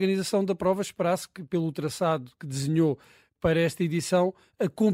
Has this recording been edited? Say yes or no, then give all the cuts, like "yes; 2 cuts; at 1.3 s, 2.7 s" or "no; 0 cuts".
no; 0 cuts